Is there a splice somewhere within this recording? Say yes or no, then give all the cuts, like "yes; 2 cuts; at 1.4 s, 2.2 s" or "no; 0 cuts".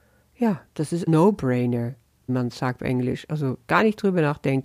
yes; 4 cuts; at 1.1 s, 2.3 s, 2.8 s, 3.7 s